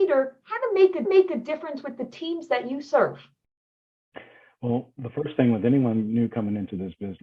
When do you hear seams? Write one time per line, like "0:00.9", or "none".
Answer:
0:01.0

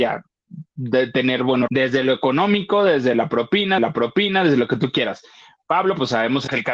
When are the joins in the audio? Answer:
0:01.7
0:03.8

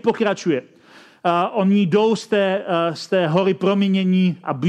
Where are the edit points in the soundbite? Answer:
none

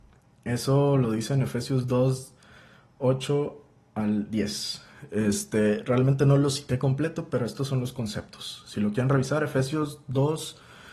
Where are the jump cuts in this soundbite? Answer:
none

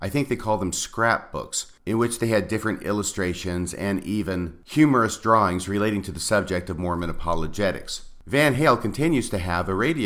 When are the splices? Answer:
none

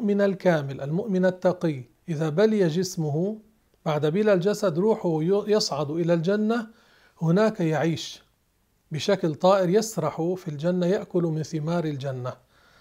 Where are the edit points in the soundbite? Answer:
none

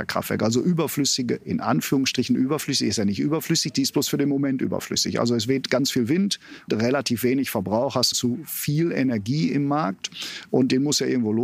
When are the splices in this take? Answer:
0:06.7
0:08.1

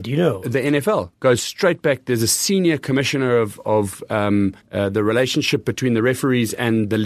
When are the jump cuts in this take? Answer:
0:04.6

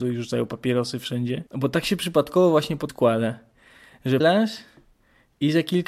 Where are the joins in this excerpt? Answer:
0:01.5
0:02.9
0:04.2

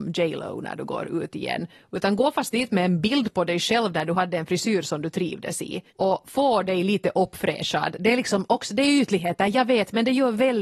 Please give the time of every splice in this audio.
0:05.9

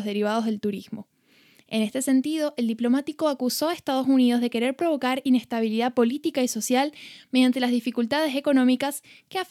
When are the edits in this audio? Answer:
none

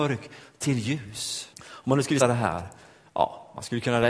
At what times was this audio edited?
0:01.5
0:02.2

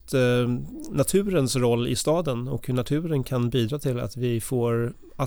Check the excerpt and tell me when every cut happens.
none

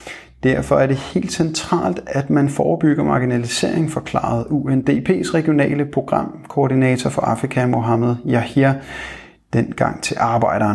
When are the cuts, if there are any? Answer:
none

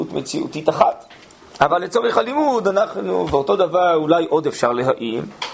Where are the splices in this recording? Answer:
none

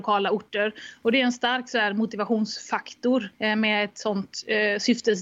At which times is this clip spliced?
0:03.3

